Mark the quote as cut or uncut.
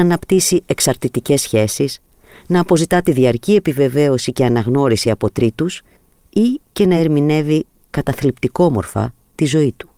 uncut